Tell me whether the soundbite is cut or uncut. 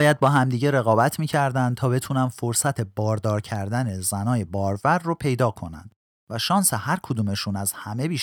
uncut